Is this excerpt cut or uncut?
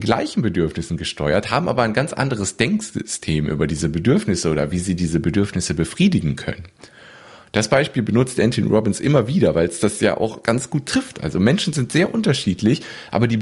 uncut